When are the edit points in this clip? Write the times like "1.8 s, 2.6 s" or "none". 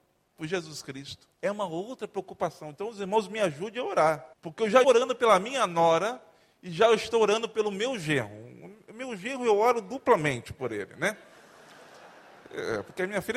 1.3 s, 4.3 s, 4.8 s